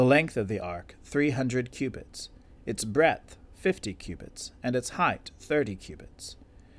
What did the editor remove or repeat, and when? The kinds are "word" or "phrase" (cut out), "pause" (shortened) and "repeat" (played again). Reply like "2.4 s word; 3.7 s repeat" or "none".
none